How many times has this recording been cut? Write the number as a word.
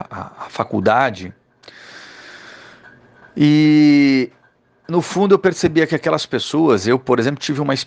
zero